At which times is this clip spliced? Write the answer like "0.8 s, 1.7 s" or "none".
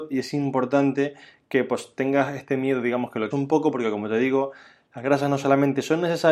3.3 s